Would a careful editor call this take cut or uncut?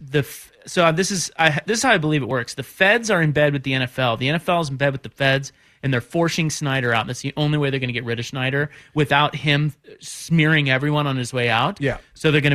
uncut